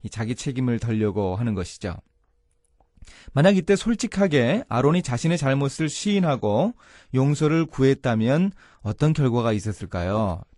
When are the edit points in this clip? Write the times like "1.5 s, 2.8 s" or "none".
none